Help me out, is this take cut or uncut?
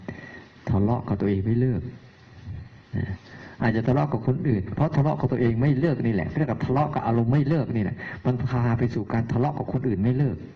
cut